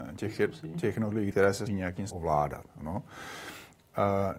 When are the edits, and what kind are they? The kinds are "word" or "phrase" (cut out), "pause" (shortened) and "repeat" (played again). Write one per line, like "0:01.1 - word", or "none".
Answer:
0:01.3 - word
0:01.7 - word
0:02.1 - word